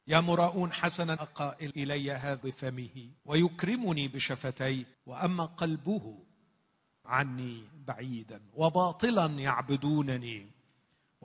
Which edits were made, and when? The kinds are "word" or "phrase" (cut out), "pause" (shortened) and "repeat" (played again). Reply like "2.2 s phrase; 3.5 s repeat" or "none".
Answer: 1.2 s phrase; 1.7 s word; 2.4 s word; 3.2 s pause; 4.9 s pause; 7.0 s word

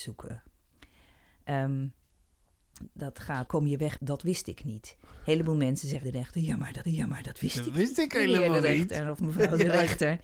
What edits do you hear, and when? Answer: 2.8 s phrase; 3.5 s word; 4.0 s word; 6.0 s word; 6.8 s repeat

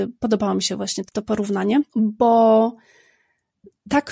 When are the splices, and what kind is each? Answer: 1.1 s word; 1.9 s pause

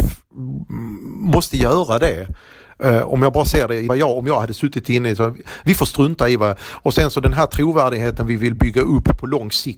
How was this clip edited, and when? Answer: 3.9 s phrase

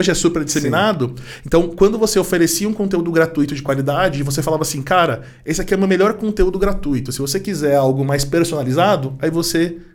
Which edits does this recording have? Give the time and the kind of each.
none

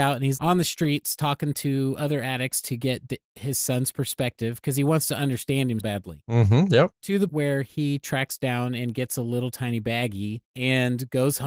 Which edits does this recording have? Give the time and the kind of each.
5.8 s word; 6.9 s pause; 7.3 s word; 10.4 s pause

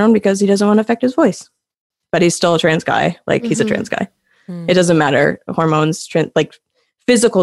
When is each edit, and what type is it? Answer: none

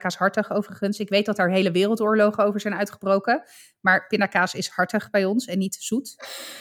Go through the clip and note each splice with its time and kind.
none

